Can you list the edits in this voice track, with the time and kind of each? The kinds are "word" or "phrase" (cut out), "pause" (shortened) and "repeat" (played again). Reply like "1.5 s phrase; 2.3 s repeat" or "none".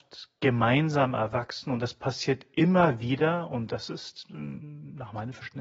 none